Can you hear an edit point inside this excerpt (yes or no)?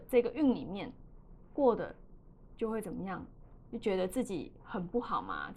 yes